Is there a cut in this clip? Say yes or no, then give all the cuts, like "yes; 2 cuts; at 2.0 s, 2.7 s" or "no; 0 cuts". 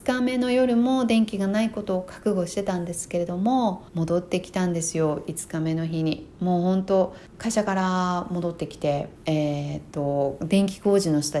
yes; 3 cuts; at 3.9 s, 7.3 s, 9.2 s